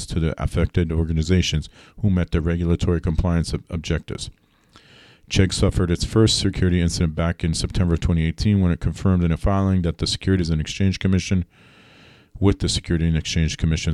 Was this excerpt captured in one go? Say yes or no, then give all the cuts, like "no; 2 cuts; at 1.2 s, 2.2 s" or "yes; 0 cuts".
yes; 0 cuts